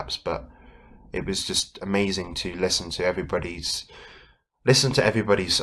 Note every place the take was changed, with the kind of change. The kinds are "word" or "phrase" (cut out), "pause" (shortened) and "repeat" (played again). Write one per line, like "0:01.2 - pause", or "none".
none